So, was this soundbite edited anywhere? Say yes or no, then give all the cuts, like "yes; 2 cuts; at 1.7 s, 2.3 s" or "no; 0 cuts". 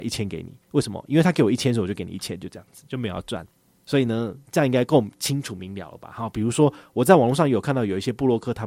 no; 0 cuts